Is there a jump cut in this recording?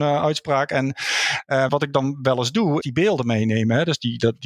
yes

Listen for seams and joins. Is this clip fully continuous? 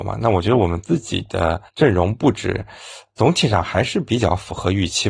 no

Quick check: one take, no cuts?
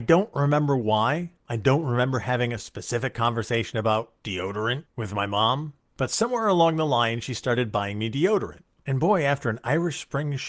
yes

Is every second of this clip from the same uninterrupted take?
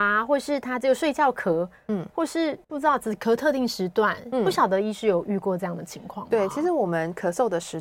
no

